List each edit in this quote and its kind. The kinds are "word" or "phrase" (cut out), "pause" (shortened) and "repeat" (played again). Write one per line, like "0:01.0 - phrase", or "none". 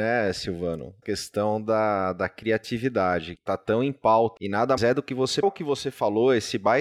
0:01.0 - word
0:03.4 - word
0:04.4 - word
0:04.8 - word
0:05.4 - word